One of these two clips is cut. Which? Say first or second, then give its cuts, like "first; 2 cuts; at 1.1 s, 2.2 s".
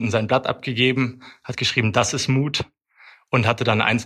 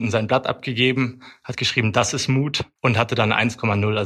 second; 1 cut; at 2.8 s